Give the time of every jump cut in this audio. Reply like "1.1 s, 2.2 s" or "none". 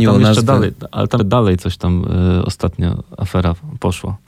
1.2 s